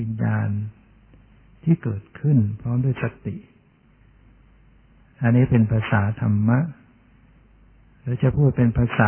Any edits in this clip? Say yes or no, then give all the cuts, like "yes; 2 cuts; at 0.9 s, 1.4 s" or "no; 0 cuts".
no; 0 cuts